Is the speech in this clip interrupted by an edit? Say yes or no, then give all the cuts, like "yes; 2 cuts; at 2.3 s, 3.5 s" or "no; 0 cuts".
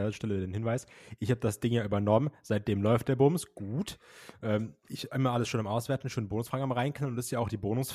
no; 0 cuts